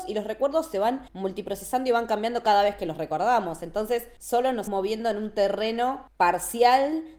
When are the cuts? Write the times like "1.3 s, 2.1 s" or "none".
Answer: 4.7 s